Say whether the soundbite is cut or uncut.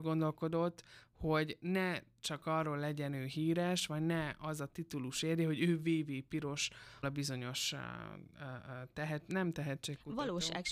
cut